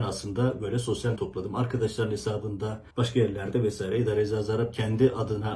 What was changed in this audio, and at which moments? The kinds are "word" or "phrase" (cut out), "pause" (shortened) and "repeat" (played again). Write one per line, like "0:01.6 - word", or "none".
0:01.2 - phrase
0:02.9 - pause